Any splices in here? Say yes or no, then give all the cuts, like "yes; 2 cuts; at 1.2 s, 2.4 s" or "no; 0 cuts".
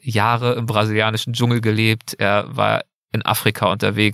no; 0 cuts